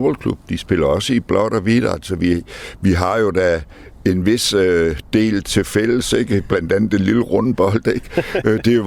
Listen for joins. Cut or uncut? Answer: uncut